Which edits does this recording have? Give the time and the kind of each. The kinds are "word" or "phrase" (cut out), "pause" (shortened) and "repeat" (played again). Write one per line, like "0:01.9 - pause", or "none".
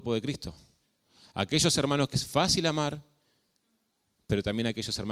0:02.1 - word